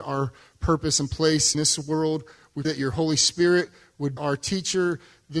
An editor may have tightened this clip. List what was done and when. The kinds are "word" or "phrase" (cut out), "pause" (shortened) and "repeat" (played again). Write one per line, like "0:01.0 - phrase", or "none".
0:01.5 - word
0:02.6 - word
0:04.2 - word